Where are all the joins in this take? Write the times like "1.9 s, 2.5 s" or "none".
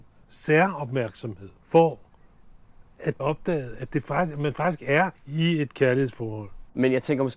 1.6 s, 3.2 s, 5.2 s